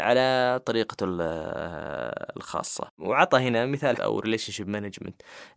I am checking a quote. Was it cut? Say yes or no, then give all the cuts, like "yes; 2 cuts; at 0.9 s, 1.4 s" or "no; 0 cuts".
yes; 1 cut; at 4.0 s